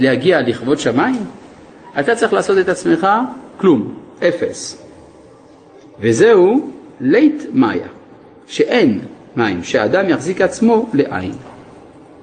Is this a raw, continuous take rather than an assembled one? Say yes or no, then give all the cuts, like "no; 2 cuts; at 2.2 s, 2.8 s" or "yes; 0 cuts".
yes; 0 cuts